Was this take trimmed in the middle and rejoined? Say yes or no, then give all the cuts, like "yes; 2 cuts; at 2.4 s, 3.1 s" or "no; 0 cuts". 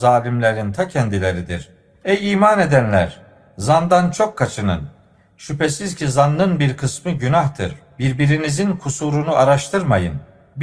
no; 0 cuts